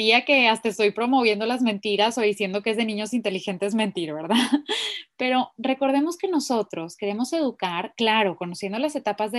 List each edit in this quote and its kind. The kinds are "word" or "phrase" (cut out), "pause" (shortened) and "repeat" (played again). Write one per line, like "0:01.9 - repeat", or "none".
none

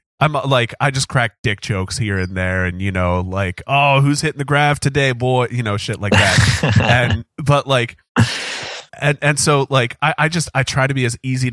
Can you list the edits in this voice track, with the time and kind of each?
0:08.9 - pause

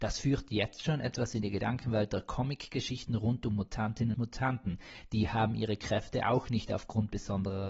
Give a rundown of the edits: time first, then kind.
0:04.1 - word

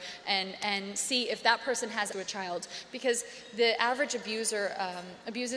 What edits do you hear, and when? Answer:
0:02.1 - word

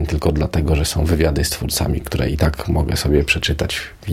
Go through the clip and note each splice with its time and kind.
none

